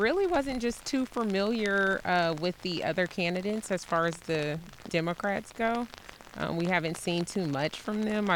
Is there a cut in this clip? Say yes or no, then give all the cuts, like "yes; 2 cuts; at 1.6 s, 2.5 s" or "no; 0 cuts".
no; 0 cuts